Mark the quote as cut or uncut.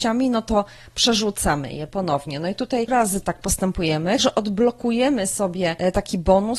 cut